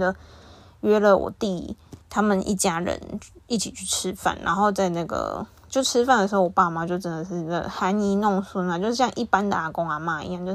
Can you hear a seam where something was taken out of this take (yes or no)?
yes